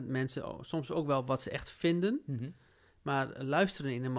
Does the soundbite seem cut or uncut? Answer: uncut